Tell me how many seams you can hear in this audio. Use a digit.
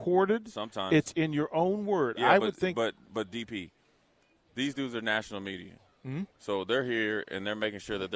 0